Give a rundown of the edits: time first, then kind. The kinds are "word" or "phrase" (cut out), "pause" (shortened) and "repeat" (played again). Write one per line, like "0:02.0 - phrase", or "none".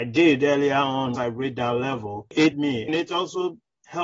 0:01.2 - word
0:02.5 - word
0:02.9 - word